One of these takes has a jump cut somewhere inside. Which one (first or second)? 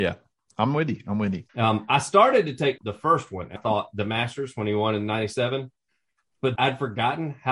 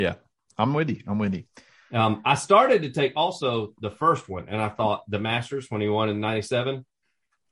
first